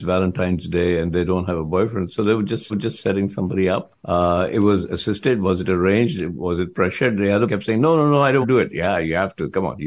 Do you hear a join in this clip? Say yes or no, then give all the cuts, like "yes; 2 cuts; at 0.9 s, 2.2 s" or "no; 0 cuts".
yes; 4 cuts; at 2.7 s, 4.0 s, 7.5 s, 8.4 s